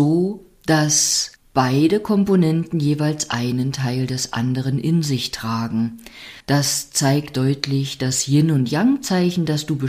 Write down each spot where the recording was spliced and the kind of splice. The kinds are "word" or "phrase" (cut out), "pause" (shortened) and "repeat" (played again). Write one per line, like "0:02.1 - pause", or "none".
0:01.4 - pause
0:06.4 - pause